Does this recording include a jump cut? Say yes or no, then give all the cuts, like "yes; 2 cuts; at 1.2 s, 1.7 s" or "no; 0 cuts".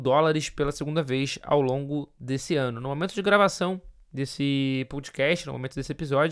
no; 0 cuts